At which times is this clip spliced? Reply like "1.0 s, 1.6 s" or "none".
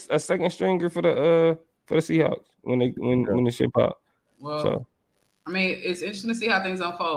none